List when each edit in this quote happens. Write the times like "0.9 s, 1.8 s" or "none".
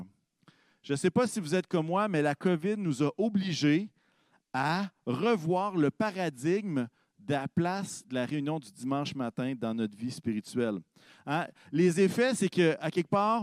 none